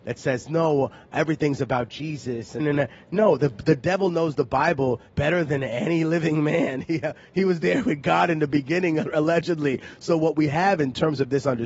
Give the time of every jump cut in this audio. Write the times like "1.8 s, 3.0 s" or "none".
2.6 s, 5.1 s